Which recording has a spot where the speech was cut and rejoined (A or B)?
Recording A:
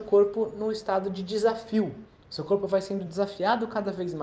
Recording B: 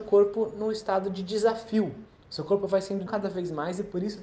B